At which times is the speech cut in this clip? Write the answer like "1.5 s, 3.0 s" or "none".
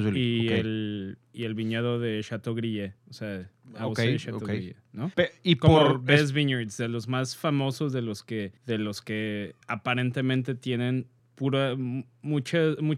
3.0 s, 5.1 s, 8.6 s, 9.6 s, 11.2 s